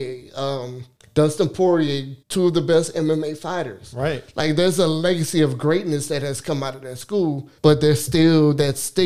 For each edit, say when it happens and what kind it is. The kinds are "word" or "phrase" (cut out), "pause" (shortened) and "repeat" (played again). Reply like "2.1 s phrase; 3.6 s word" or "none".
1.0 s pause; 2.2 s pause; 7.6 s pause